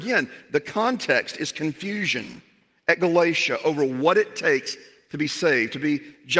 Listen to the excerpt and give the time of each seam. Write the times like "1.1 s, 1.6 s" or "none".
none